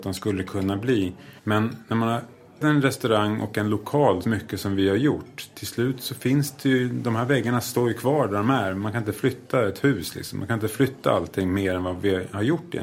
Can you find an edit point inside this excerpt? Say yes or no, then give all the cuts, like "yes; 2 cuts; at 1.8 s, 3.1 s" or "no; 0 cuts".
yes; 3 cuts; at 1.4 s, 2.6 s, 4.2 s